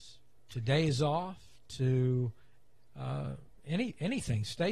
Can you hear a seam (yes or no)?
no